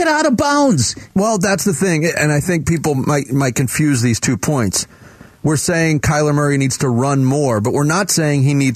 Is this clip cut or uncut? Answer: uncut